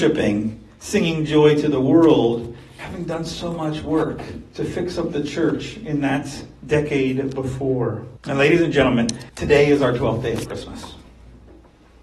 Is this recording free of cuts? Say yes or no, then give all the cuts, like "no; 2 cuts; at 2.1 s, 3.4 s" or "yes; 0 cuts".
no; 2 cuts; at 8.2 s, 9.3 s